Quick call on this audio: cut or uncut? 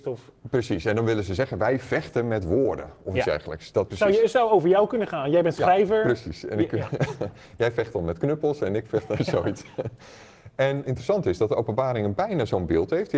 cut